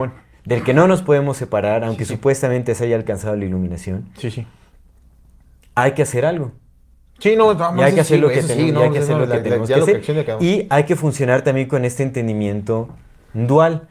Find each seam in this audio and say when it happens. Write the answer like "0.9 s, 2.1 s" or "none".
none

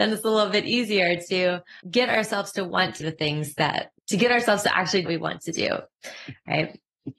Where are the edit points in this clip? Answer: 1.8 s, 3.0 s, 4.0 s, 5.1 s

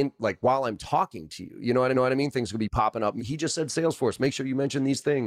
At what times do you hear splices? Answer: 1.9 s, 3.2 s

